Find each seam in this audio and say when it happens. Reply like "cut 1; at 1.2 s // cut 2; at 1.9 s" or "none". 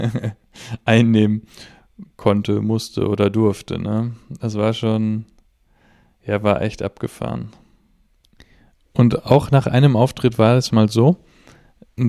none